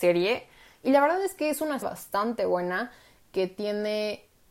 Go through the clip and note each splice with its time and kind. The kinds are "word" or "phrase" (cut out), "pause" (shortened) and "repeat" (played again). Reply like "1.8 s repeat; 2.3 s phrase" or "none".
1.8 s word